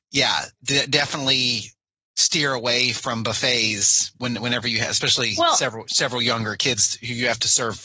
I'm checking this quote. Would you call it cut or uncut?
uncut